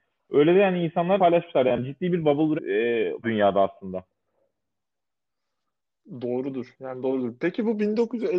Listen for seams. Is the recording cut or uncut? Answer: cut